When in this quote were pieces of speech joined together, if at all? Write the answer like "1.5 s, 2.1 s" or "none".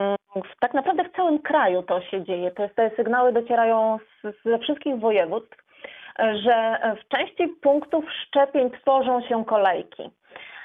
none